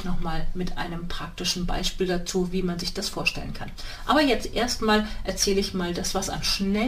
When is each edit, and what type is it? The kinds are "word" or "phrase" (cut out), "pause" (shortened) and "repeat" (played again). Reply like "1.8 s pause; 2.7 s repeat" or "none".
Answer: none